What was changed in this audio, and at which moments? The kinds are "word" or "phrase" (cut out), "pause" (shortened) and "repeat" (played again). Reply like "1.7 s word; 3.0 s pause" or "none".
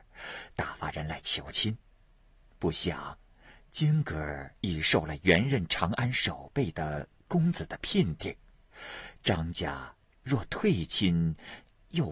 4.6 s pause